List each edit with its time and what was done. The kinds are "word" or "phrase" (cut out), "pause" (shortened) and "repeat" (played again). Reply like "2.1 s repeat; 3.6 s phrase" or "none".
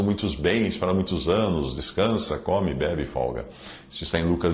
none